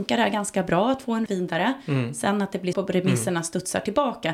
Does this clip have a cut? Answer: yes; 2 cuts; at 1.3 s, 2.7 s

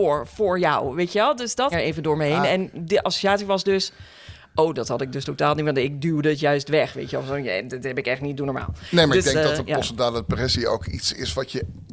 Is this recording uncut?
no; 1 cut; at 1.7 s

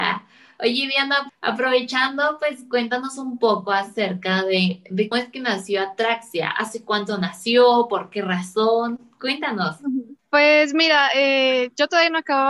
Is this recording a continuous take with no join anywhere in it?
no; 3 cuts; at 1.3 s, 5.1 s, 10.2 s

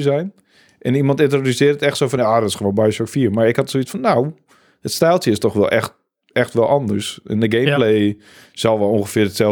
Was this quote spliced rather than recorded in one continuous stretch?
no; 0 cuts

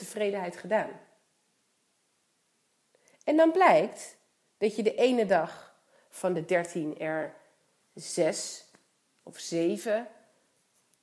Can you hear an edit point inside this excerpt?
no; 0 cuts

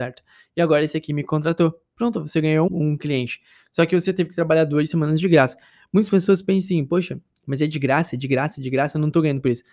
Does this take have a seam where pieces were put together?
yes; 1 cut; at 2.7 s

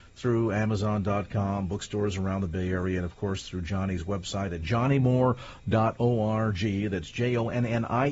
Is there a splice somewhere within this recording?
no; 0 cuts

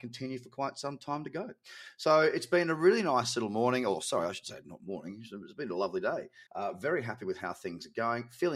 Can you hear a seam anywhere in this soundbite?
yes; 1 cut; at 6.5 s

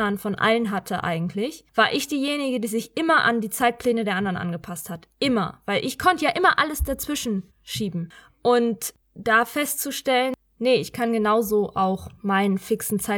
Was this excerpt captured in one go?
no; 3 cuts; at 1.7 s, 7.5 s, 9.0 s

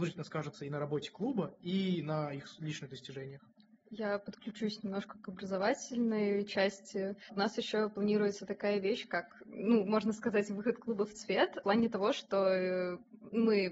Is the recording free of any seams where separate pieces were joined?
yes; 0 cuts

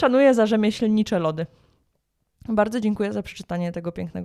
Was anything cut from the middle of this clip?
no; 0 cuts

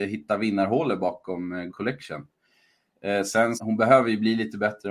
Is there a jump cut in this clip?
yes; 2 cuts; at 1.7 s, 3.6 s

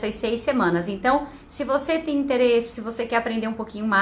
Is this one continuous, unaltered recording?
yes; 0 cuts

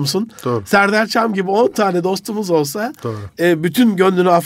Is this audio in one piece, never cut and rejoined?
yes; 0 cuts

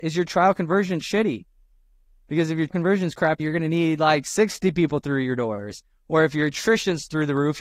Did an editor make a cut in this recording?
yes; 2 cuts; at 2.7 s, 3.4 s

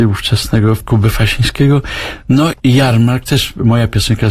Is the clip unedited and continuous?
no; 1 cut; at 2.5 s

